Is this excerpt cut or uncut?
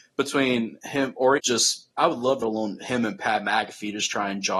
cut